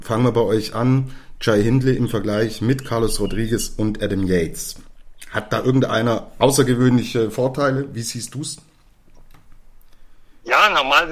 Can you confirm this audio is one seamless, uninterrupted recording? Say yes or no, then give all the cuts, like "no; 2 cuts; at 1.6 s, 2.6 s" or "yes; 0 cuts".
yes; 0 cuts